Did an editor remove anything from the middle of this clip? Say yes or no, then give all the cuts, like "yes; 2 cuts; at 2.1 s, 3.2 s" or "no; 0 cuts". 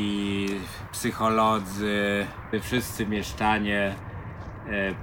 no; 0 cuts